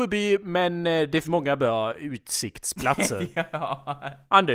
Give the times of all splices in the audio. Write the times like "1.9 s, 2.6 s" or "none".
1.2 s